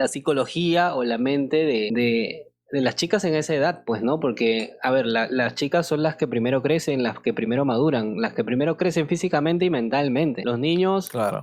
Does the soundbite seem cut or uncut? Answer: uncut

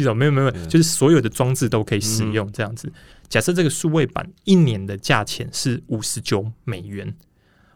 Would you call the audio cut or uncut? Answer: uncut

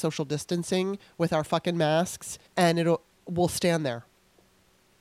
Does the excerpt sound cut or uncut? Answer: cut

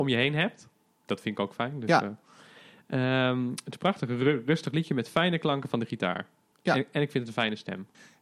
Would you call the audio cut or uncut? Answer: uncut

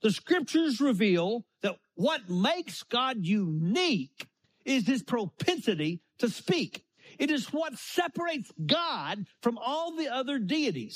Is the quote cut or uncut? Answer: uncut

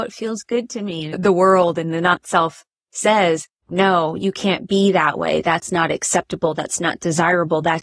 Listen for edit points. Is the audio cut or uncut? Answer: uncut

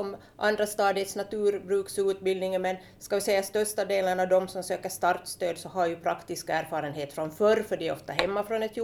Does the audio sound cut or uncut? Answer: uncut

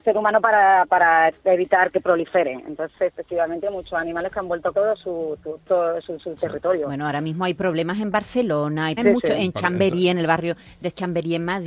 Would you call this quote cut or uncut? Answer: cut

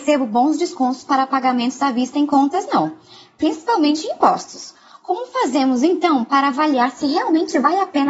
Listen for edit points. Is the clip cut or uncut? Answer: uncut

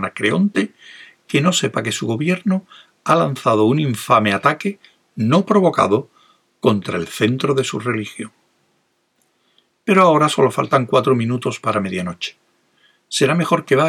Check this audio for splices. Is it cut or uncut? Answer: uncut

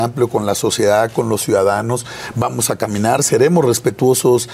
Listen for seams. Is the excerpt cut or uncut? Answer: uncut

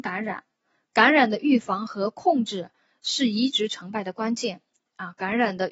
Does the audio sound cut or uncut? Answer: uncut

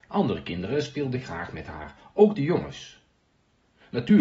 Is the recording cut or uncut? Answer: uncut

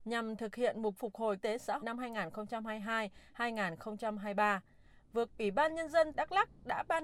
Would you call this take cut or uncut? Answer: cut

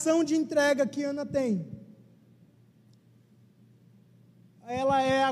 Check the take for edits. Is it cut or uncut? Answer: uncut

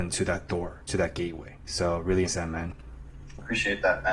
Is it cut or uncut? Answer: cut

